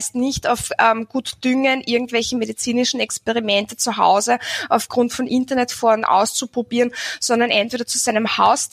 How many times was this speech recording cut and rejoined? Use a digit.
1